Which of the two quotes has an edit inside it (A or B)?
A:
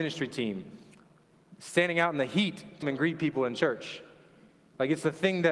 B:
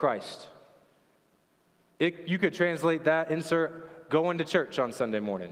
A